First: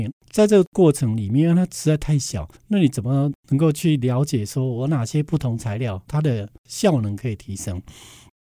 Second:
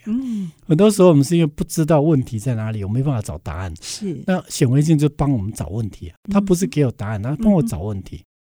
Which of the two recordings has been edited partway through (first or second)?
first